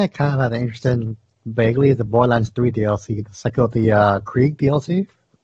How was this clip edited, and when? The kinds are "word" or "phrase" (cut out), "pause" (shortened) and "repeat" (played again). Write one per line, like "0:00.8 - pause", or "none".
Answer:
none